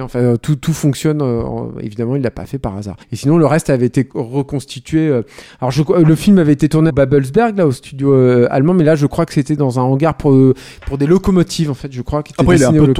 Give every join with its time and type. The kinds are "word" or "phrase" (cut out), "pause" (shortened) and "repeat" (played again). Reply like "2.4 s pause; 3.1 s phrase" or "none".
3.0 s pause; 4.1 s pause; 6.9 s word